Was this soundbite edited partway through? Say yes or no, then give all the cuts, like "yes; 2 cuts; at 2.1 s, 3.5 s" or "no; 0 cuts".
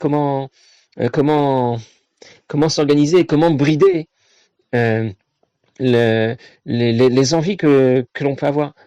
no; 0 cuts